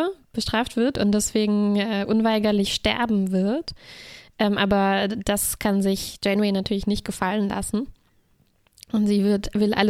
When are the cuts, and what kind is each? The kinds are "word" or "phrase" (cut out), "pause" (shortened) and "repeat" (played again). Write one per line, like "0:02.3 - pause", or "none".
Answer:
none